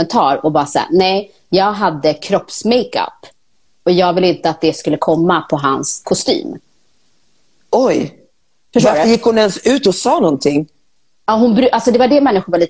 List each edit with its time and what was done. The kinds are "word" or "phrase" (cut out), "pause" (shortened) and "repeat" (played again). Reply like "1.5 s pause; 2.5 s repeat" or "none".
none